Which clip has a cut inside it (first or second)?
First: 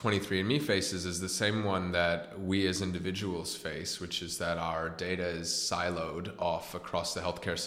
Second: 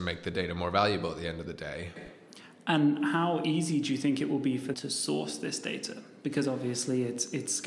second